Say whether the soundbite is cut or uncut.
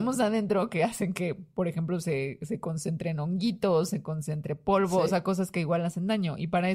uncut